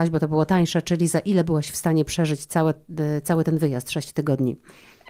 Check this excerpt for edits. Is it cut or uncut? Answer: uncut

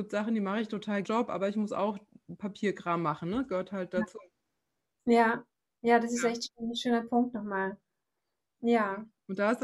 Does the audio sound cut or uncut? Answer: cut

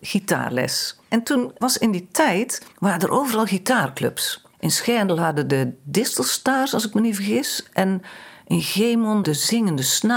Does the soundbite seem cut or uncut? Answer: cut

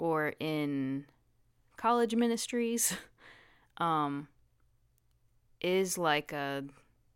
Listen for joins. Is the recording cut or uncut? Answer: uncut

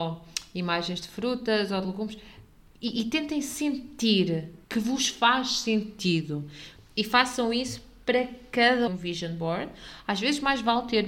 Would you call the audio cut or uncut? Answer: cut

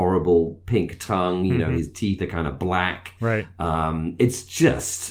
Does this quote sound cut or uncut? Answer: uncut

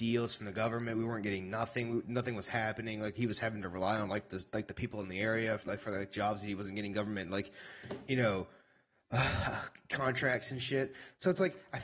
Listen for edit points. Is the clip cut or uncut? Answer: cut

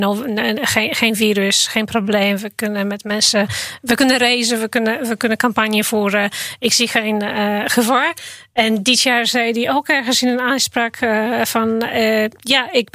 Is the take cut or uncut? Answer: uncut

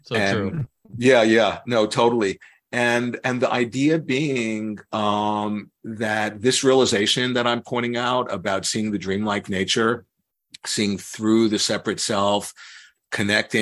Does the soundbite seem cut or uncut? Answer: uncut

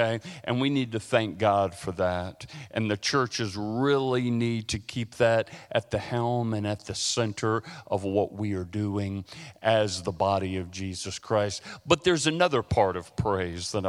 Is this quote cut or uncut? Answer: uncut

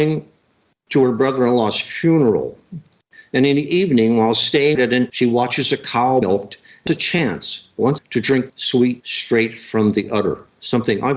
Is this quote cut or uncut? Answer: cut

